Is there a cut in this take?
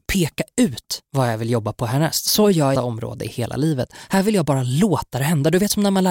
yes; 1 cut; at 2.7 s

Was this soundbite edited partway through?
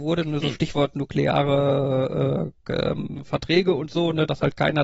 no; 0 cuts

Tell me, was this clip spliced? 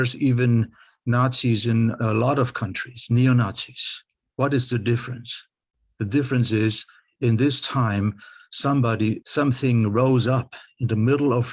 yes; 1 cut; at 4.1 s

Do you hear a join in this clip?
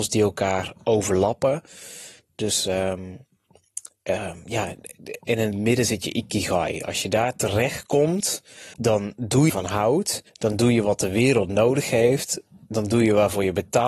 yes; 3 cuts; at 8.7 s, 9.5 s, 10.3 s

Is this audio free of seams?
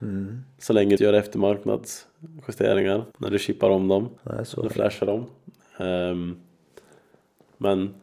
no; 3 cuts; at 1.0 s, 3.1 s, 4.2 s

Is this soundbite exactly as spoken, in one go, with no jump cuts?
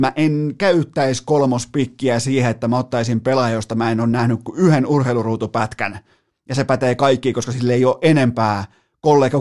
yes; 0 cuts

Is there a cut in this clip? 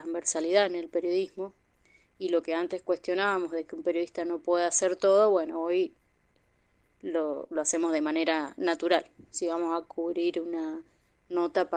no; 0 cuts

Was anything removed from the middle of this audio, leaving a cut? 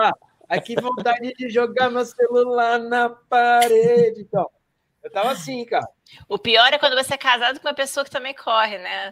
no; 0 cuts

